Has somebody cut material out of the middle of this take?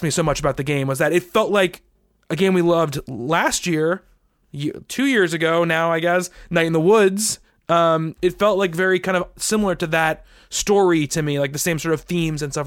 no; 0 cuts

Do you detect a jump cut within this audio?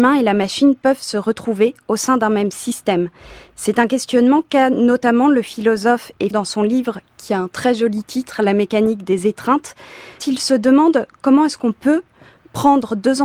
yes; 2 cuts; at 6.3 s, 10.2 s

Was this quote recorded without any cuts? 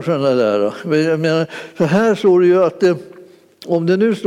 yes; 0 cuts

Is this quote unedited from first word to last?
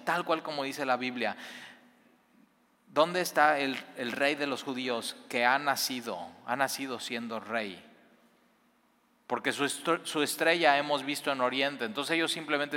yes; 0 cuts

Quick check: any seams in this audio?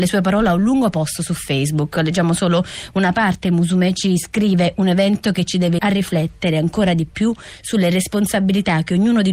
yes; 1 cut; at 5.8 s

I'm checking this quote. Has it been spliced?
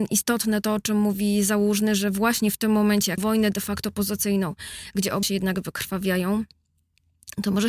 yes; 2 cuts; at 3.2 s, 5.2 s

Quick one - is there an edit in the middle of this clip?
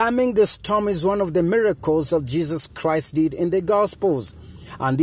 no; 0 cuts

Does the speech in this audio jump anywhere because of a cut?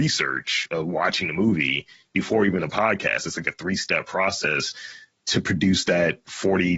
no; 0 cuts

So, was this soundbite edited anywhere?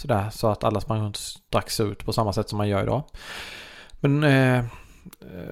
no; 0 cuts

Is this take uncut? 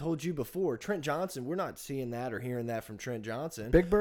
yes; 0 cuts

